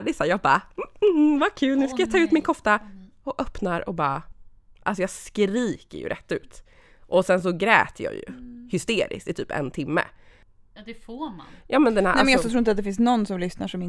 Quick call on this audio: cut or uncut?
uncut